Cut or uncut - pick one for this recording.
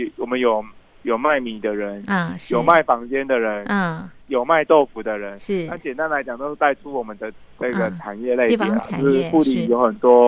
cut